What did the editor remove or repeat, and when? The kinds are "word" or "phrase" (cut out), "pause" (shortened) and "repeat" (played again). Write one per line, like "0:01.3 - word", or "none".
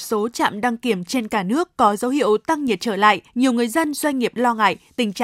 0:03.3 - pause